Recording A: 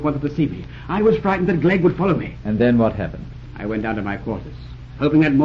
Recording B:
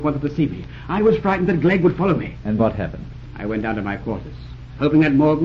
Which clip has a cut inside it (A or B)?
B